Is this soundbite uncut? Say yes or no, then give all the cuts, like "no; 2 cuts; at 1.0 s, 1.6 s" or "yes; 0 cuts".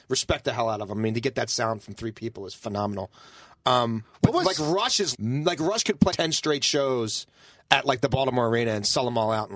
no; 2 cuts; at 5.1 s, 6.1 s